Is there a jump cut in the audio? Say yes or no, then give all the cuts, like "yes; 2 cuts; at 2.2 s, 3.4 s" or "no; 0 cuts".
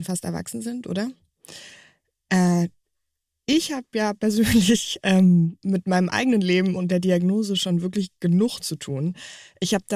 no; 0 cuts